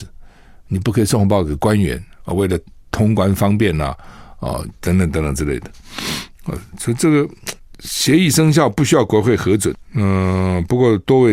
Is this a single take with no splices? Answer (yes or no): yes